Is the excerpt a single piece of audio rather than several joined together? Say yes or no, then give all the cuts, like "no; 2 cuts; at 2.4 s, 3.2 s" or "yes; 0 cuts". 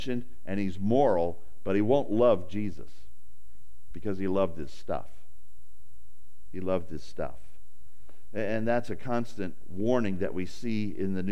yes; 0 cuts